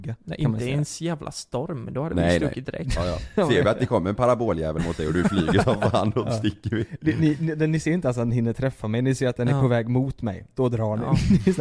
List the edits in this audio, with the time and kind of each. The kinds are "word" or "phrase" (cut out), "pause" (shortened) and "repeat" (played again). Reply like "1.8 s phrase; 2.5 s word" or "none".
none